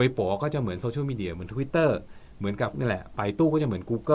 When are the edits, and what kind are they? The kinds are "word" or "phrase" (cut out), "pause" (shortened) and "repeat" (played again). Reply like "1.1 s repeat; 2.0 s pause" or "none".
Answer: 2.7 s word